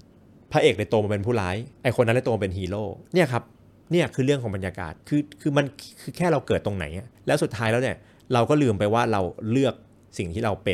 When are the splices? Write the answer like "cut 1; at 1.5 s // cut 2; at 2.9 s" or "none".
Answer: cut 1; at 1.7 s // cut 2; at 5.0 s // cut 3; at 7.1 s